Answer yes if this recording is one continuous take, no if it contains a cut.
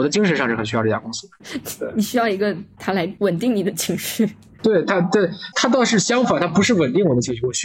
yes